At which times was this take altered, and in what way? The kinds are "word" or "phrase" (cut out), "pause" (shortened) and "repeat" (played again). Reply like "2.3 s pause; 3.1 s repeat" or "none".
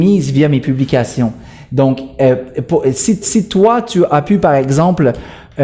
3.2 s repeat